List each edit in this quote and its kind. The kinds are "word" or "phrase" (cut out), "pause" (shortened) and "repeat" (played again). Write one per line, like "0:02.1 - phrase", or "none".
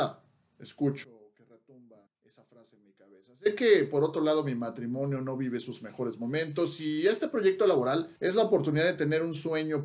0:02.1 - pause
0:08.2 - pause